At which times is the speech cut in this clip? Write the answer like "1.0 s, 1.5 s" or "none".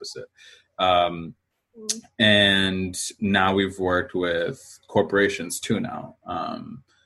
none